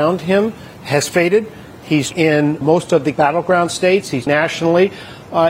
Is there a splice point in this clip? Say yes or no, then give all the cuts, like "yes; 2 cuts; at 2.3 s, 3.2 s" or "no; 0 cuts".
yes; 4 cuts; at 2.1 s, 2.6 s, 3.1 s, 4.3 s